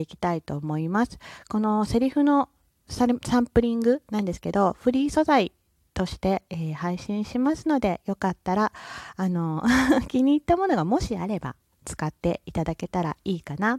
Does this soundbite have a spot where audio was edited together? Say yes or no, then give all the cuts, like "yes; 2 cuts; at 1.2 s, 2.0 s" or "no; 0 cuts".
no; 0 cuts